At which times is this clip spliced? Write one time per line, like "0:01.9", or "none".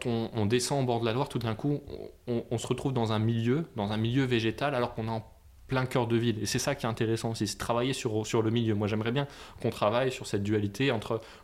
none